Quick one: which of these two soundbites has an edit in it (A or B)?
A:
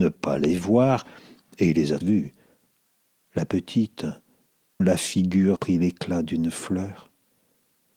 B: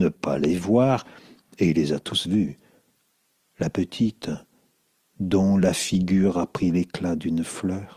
A